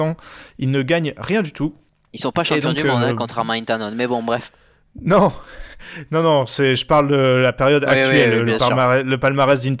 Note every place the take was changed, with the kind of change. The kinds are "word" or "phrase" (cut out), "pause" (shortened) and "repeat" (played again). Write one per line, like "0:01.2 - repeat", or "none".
none